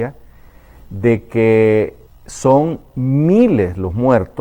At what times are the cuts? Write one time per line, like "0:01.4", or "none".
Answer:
0:02.1